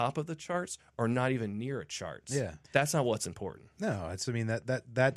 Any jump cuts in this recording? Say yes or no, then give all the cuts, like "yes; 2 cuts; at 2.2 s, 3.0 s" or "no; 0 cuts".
yes; 1 cut; at 2.6 s